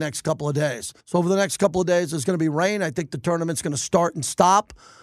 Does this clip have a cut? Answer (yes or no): yes